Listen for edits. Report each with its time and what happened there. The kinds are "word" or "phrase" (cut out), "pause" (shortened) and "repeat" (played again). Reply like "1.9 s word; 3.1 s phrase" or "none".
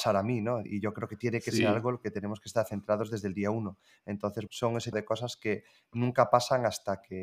4.5 s word; 4.9 s word